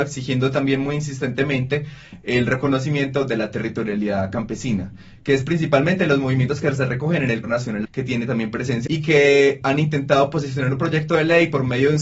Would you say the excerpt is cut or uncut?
cut